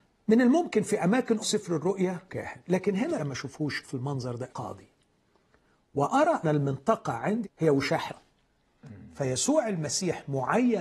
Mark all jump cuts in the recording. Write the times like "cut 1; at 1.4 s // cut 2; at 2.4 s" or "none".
cut 1; at 1.4 s // cut 2; at 2.3 s // cut 3; at 3.2 s // cut 4; at 3.8 s // cut 5; at 4.5 s // cut 6; at 6.4 s // cut 7; at 7.4 s // cut 8; at 8.1 s